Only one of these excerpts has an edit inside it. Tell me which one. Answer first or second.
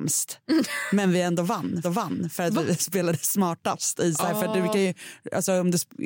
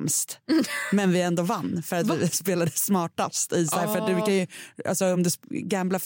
first